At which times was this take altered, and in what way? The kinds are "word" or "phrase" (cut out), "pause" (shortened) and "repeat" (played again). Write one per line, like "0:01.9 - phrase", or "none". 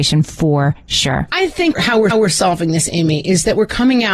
0:02.1 - repeat